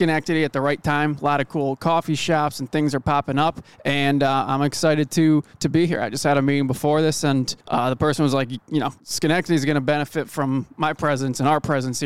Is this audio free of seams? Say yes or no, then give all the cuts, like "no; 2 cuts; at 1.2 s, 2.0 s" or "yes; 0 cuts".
no; 4 cuts; at 3.7 s, 5.5 s, 7.6 s, 9.0 s